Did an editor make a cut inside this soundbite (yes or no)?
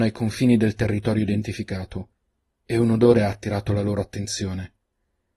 no